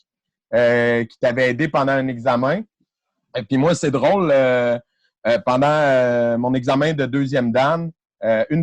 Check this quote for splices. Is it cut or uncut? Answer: uncut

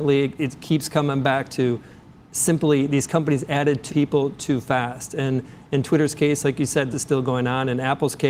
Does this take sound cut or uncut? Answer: cut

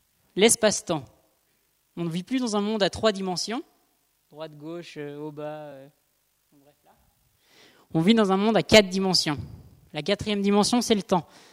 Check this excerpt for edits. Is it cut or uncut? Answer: uncut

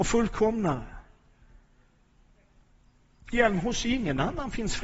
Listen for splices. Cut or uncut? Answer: cut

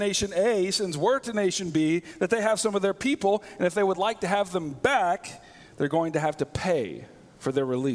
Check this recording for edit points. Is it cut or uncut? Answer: uncut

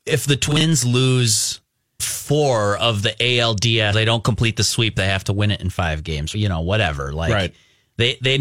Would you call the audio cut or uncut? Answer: cut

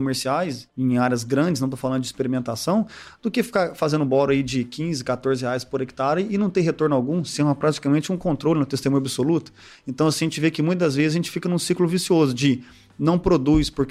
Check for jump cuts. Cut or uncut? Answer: uncut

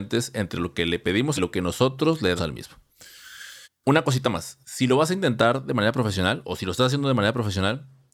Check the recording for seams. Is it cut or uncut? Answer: cut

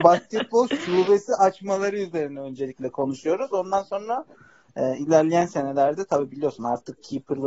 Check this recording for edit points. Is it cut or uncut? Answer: uncut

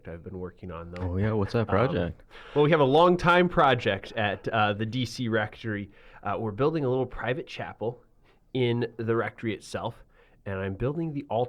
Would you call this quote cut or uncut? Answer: uncut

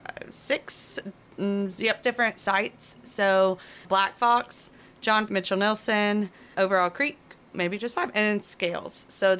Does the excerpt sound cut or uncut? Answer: cut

